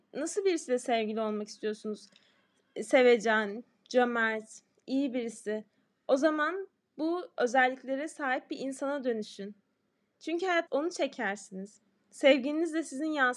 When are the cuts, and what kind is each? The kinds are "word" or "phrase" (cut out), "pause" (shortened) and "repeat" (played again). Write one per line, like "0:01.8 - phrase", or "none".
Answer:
0:10.7 - word